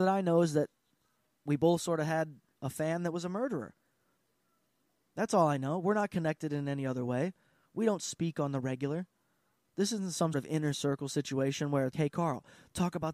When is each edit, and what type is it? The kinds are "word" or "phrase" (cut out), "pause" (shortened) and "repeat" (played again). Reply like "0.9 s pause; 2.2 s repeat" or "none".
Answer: 10.3 s word; 11.9 s word